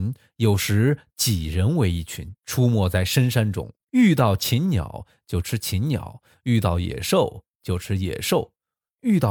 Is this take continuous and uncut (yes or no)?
no